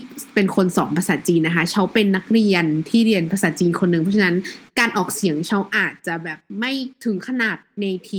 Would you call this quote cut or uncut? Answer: uncut